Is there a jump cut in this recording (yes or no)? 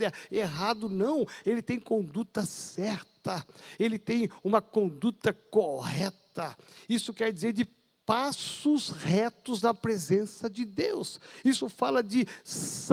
no